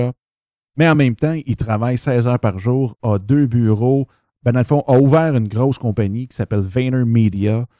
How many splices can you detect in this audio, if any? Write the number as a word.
zero